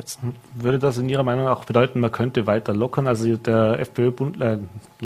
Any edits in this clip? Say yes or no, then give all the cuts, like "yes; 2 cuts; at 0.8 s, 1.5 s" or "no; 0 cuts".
no; 0 cuts